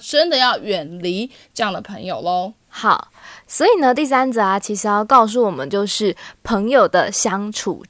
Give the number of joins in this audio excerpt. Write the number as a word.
one